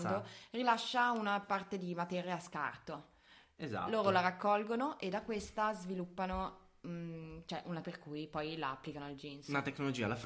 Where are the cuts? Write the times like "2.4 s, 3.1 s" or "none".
7.8 s